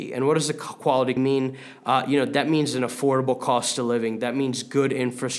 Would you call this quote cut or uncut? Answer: cut